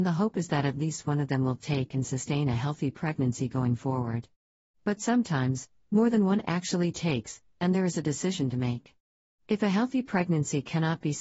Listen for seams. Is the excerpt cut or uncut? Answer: uncut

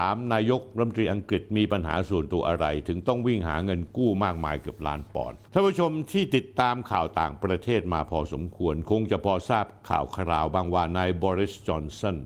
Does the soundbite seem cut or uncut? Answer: cut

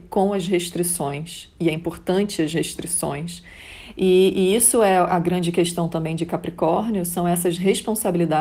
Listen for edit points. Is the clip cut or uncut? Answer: uncut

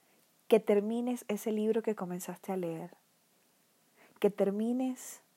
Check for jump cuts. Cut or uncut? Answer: uncut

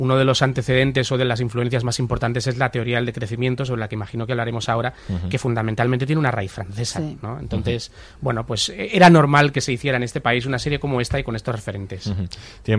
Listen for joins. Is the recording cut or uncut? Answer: uncut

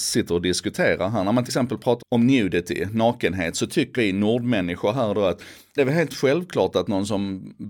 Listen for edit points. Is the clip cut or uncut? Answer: cut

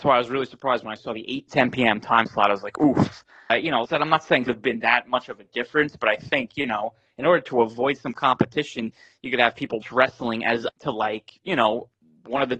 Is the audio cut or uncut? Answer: cut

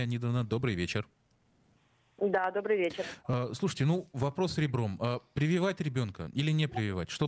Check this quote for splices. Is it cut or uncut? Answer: uncut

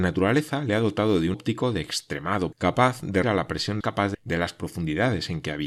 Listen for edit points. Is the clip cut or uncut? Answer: cut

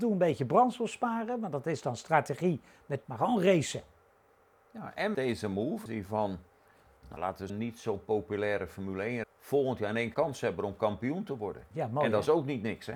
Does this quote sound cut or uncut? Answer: cut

